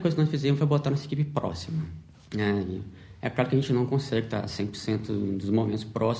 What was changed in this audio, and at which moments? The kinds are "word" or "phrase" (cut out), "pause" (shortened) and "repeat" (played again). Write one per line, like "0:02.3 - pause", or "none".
0:02.1 - pause